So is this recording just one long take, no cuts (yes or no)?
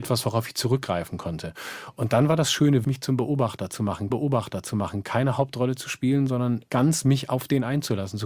no